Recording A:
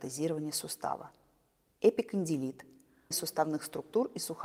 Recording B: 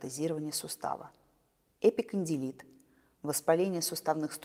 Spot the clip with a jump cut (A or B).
A